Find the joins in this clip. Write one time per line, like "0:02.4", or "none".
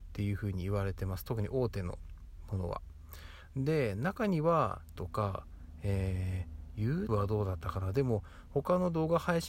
0:05.0
0:07.1